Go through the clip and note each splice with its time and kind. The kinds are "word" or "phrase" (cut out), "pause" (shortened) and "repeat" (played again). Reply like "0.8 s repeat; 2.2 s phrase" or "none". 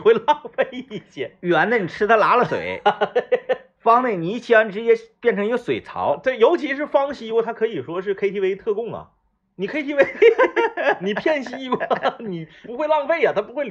none

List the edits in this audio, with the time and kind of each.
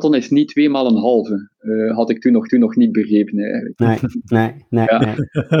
2.5 s repeat

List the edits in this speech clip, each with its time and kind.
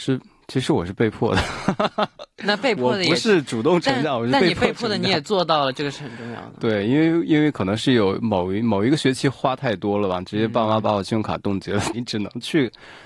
11.9 s phrase

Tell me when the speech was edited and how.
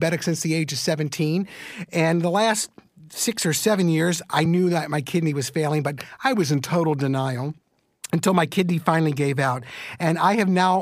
none

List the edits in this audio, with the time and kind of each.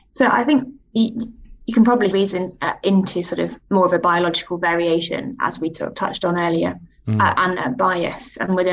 2.1 s phrase; 7.5 s word

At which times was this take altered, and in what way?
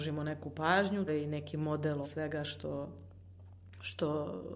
1.1 s word; 2.0 s word

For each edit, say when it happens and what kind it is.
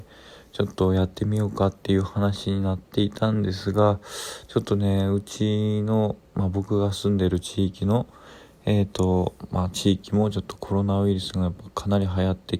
6.3 s pause

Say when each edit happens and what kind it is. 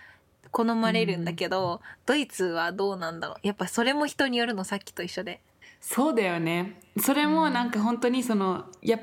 5.6 s pause

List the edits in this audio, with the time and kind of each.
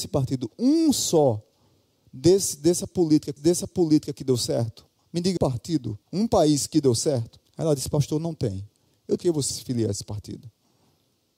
3.4 s repeat; 5.4 s word; 6.0 s pause; 7.5 s pause; 9.2 s phrase; 9.5 s word

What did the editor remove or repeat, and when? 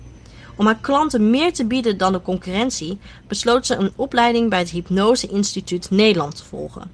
none

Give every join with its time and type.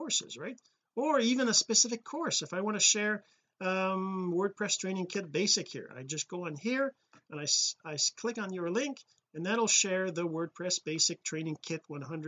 none

